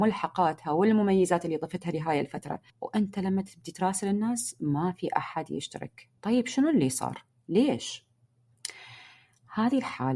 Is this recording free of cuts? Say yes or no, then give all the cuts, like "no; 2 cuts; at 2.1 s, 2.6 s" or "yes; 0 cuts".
no; 2 cuts; at 2.7 s, 6.2 s